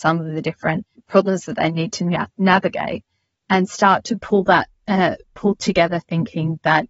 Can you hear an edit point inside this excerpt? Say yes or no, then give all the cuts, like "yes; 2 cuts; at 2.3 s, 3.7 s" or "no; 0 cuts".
no; 0 cuts